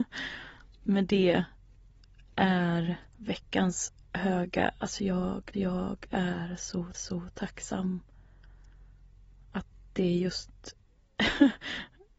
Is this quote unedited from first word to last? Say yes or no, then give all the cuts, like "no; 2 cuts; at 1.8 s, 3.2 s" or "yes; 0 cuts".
no; 3 cuts; at 3.1 s, 5.5 s, 6.9 s